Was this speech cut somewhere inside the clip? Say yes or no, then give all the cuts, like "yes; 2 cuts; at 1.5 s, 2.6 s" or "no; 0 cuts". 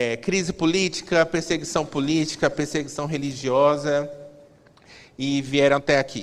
no; 0 cuts